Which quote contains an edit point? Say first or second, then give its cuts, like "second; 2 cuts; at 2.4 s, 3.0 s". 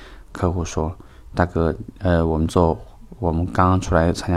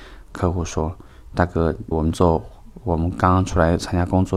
second; 1 cut; at 1.9 s